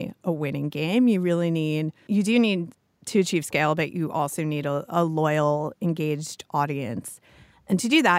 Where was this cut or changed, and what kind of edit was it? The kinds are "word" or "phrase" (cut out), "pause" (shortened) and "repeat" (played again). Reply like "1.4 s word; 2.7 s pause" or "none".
2.1 s word